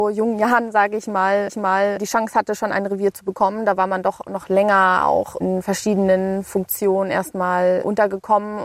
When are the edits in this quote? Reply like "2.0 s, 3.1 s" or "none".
1.5 s